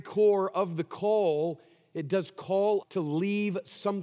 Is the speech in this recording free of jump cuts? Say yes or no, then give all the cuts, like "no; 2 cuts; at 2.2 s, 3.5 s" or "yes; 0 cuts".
no; 1 cut; at 2.8 s